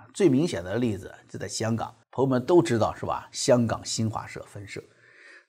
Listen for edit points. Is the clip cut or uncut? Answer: cut